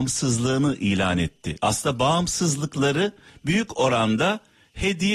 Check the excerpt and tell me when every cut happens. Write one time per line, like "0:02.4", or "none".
none

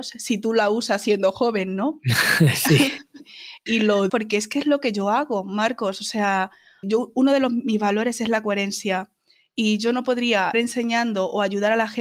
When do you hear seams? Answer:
0:03.7
0:04.1
0:06.8
0:10.5

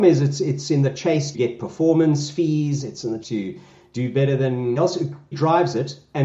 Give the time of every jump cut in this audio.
0:01.3
0:03.2
0:04.8
0:05.3

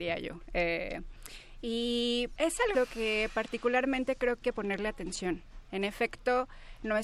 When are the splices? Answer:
0:02.4
0:02.7
0:04.4

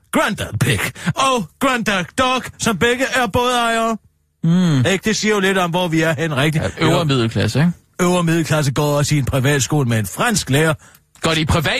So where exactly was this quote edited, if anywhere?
none

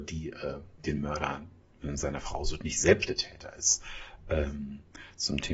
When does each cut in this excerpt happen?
none

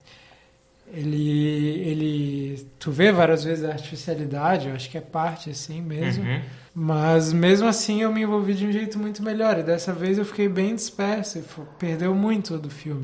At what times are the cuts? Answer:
0:06.7

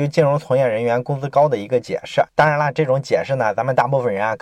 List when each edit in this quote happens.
0:02.3

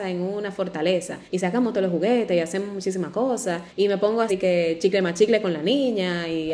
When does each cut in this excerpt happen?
0:01.3
0:03.7
0:04.3

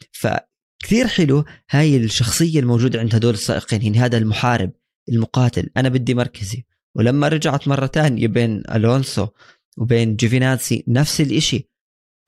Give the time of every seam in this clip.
none

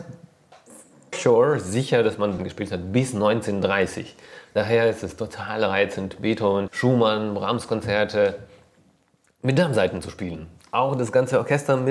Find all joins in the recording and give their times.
0:01.1
0:02.4
0:06.7

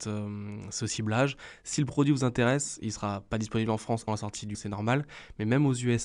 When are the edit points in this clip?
0:04.1
0:04.5

